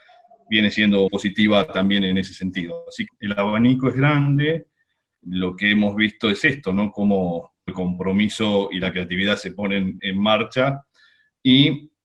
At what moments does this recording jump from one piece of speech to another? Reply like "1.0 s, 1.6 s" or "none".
1.1 s, 3.1 s, 7.7 s, 10.0 s